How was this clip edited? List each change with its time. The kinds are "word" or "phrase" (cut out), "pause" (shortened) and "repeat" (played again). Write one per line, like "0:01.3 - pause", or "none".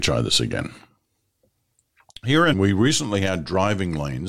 0:02.5 - word